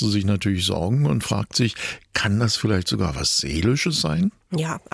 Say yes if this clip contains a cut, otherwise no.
no